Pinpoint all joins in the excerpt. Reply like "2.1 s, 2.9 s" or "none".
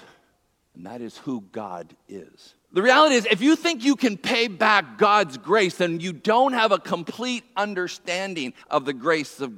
2.6 s, 8.6 s